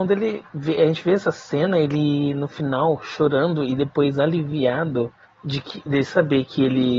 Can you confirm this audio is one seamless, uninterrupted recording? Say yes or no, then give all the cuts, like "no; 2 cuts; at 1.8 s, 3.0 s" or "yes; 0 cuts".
no; 1 cut; at 5.2 s